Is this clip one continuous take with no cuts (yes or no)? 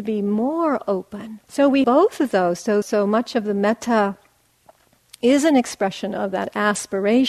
no